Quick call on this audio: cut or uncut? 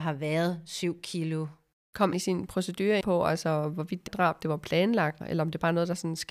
cut